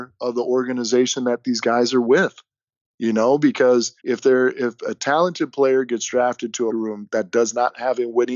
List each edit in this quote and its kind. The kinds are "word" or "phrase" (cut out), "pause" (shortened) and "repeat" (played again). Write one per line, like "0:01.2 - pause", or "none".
0:04.0 - pause
0:06.7 - phrase

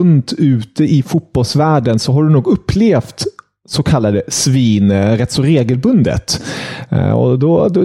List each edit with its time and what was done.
none

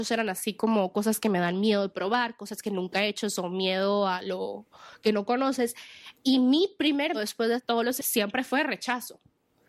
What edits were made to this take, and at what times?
0:07.1 - word
0:07.6 - word
0:08.0 - word

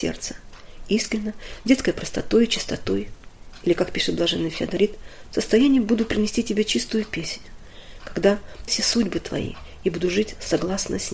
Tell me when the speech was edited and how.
0:05.3 - word
0:08.7 - word

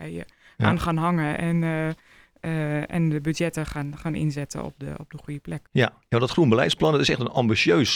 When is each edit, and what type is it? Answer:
0:05.7 - pause

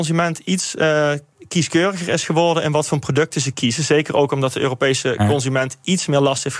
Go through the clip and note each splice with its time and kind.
none

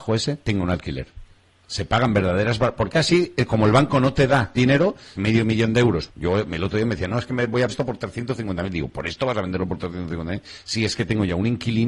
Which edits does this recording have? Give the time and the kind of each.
0:01.4 - pause
0:04.6 - word
0:05.1 - phrase
0:06.1 - phrase
0:07.7 - word

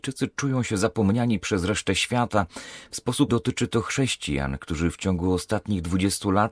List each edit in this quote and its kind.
0:03.3 - word

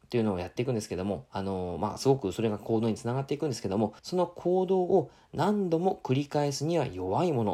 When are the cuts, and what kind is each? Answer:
0:04.0 - pause

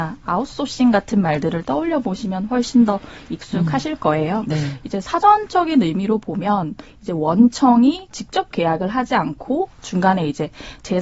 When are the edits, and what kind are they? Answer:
0:08.1 - word

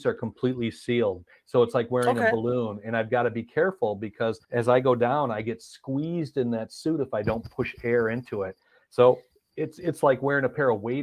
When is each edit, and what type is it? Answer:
0:04.4 - pause

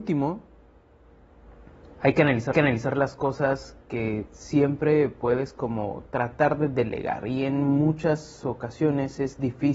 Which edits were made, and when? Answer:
0:02.5 - repeat
0:03.8 - pause

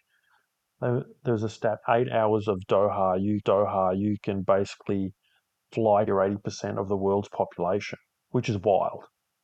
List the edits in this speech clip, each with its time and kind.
0:01.8 - word
0:03.4 - repeat
0:06.1 - phrase

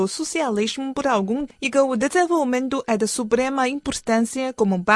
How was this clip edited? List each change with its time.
0:01.5 - word

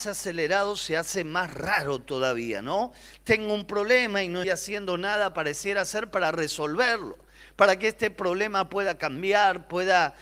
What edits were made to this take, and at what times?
0:04.4 - word

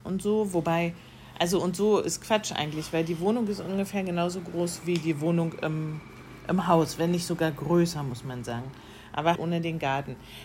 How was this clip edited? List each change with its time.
0:04.8 - word
0:09.4 - word

